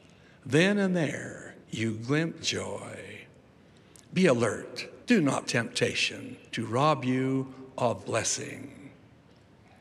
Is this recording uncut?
no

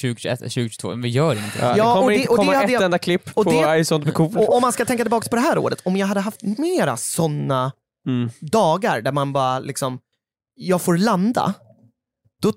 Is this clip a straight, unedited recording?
yes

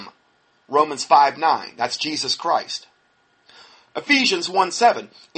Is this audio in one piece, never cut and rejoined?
yes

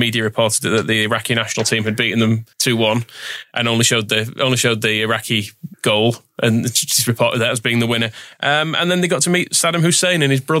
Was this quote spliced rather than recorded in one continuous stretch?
yes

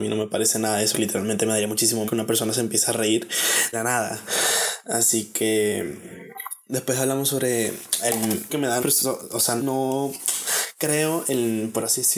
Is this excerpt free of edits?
no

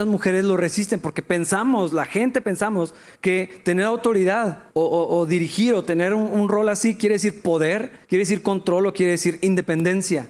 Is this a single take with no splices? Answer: no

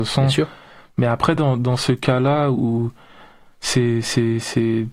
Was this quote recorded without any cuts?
yes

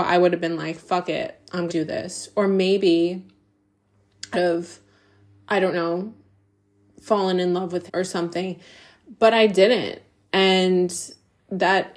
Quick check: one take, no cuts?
no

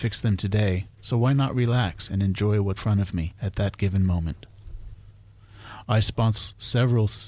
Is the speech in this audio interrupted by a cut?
yes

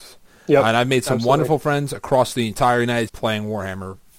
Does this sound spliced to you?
yes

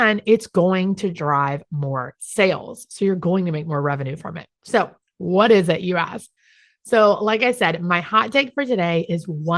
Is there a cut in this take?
yes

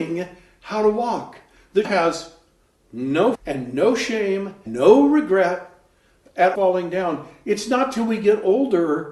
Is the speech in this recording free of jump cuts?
no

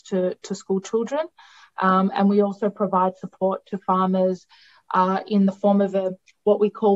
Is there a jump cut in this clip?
no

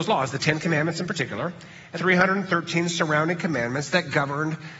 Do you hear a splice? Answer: yes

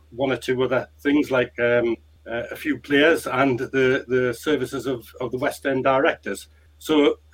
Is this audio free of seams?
yes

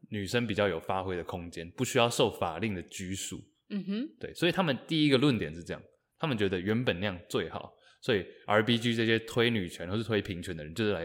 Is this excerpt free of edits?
yes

